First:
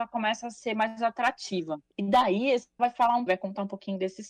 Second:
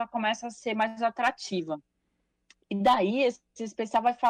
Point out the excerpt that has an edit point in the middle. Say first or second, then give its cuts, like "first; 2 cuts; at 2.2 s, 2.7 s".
first; 3 cuts; at 1.9 s, 2.8 s, 3.3 s